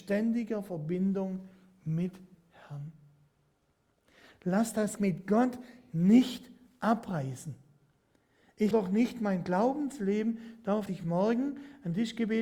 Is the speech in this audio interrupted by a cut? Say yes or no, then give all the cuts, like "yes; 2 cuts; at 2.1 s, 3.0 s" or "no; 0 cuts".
yes; 4 cuts; at 2.3 s, 5.0 s, 8.7 s, 10.9 s